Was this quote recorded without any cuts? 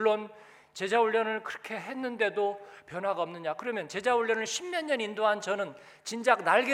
yes; 0 cuts

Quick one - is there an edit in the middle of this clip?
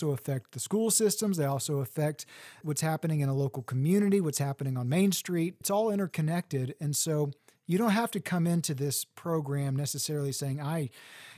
no; 0 cuts

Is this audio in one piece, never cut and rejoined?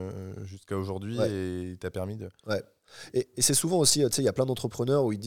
yes; 0 cuts

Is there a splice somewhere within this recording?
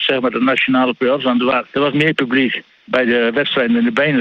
yes; 2 cuts; at 1.7 s, 2.7 s

